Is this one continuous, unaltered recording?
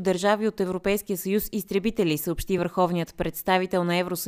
yes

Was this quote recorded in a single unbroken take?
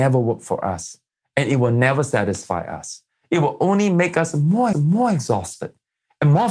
no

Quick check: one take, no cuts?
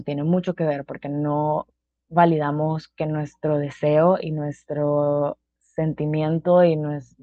yes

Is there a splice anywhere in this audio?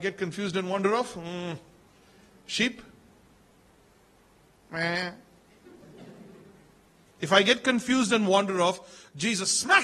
no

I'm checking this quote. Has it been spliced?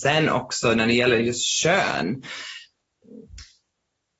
no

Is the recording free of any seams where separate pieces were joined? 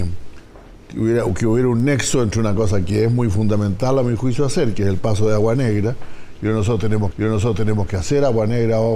no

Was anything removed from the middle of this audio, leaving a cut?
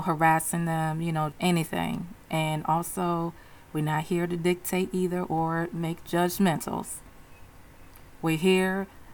yes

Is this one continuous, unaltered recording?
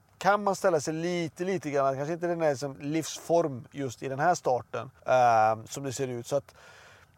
no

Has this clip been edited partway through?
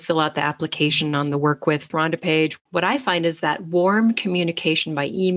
yes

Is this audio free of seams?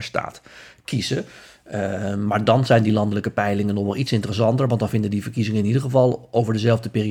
yes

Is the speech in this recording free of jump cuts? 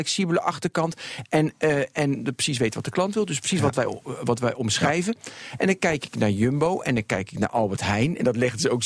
yes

